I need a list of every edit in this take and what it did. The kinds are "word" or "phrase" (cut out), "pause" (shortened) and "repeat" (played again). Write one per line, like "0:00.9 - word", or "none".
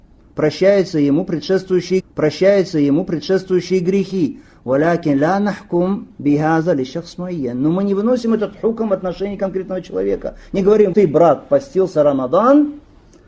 0:02.0 - repeat
0:10.9 - word